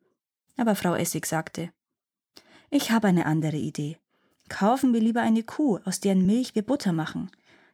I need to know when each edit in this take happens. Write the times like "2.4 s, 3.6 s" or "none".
none